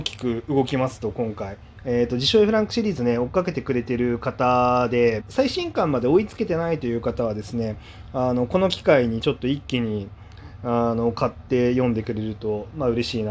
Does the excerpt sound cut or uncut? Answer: cut